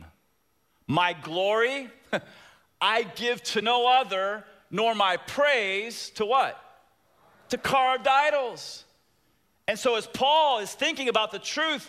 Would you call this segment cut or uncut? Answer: uncut